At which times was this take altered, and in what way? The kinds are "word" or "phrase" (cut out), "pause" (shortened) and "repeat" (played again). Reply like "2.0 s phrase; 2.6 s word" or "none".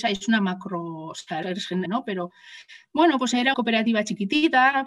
1.4 s word; 1.9 s word; 3.5 s word